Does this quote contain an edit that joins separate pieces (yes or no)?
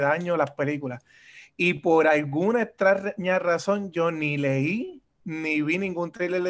no